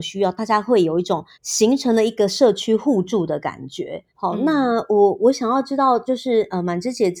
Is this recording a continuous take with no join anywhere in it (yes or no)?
no